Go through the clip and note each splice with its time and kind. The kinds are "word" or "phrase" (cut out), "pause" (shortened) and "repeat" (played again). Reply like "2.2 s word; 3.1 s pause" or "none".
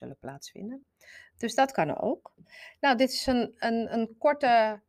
none